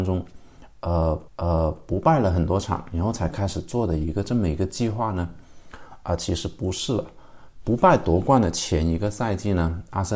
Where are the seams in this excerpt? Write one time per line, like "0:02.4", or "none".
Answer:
0:01.3